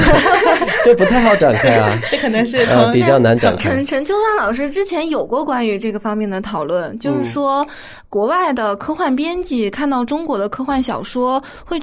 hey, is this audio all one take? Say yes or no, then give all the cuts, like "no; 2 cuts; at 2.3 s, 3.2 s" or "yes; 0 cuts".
yes; 0 cuts